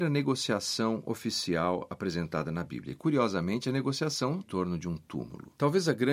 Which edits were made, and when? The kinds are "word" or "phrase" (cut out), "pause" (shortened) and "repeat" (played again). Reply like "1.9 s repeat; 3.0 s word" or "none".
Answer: 4.4 s phrase